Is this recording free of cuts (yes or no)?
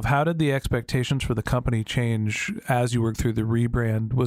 no